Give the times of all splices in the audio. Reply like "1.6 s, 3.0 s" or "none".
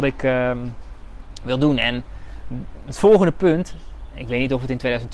none